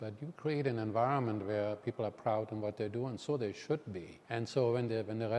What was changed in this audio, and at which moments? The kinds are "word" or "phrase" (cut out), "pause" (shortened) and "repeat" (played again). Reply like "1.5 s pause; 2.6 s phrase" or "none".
4.2 s pause